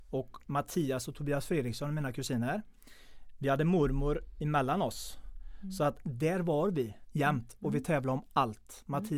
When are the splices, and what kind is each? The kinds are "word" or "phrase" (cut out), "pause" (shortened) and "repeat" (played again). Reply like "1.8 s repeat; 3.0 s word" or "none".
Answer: none